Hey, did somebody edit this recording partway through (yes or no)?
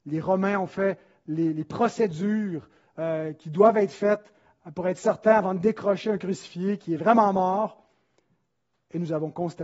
no